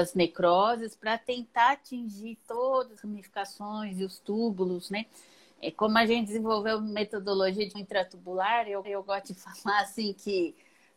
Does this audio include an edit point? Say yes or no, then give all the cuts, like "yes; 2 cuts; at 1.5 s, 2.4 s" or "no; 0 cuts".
yes; 3 cuts; at 3.0 s, 7.7 s, 8.8 s